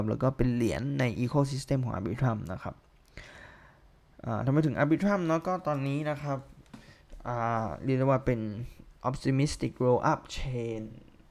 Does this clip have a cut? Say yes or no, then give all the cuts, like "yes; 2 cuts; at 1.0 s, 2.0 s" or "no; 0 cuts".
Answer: yes; 1 cut; at 9.0 s